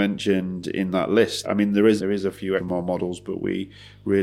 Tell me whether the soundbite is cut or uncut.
cut